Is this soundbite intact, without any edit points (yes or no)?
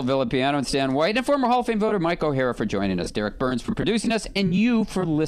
yes